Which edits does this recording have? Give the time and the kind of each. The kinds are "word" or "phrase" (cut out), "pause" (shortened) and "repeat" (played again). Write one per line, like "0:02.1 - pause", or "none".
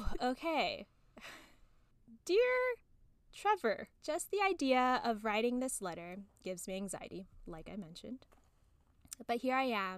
0:03.9 - pause

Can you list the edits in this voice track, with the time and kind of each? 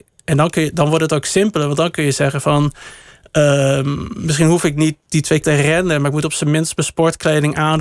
0:05.4 - word

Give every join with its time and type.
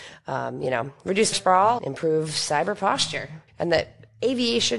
0:01.3 - phrase
0:01.8 - word
0:03.5 - pause

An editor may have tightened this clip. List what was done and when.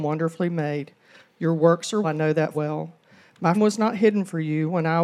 0:02.0 - word
0:02.5 - word
0:03.5 - word

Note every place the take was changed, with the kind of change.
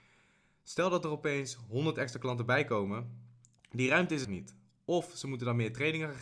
0:04.2 - word

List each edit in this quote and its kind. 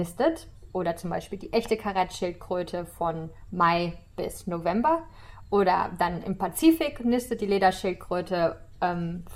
none

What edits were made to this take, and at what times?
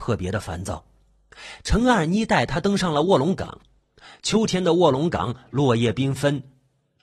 none

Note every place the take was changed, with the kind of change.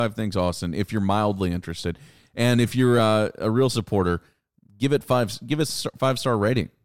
none

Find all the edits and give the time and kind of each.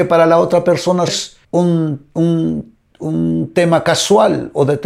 0:01.1 - word
0:01.4 - pause

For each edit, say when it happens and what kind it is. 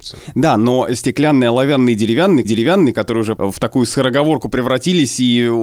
0:02.4 - repeat
0:03.4 - word

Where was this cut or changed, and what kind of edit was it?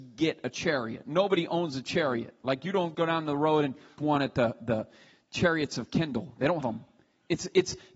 0:02.9 - word
0:04.0 - word
0:04.6 - word
0:06.6 - word

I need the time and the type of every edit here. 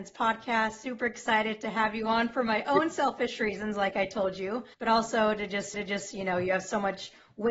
0:04.7 - pause
0:05.7 - repeat

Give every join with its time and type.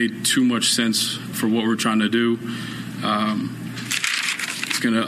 0:01.3 - word

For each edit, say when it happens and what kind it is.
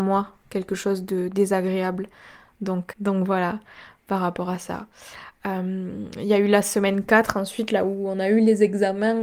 0:02.9 - word

